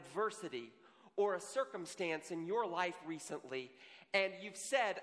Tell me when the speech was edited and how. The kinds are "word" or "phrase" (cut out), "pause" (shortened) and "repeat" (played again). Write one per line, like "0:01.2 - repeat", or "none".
none